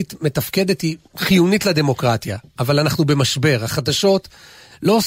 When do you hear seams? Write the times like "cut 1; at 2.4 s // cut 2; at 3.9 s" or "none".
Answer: none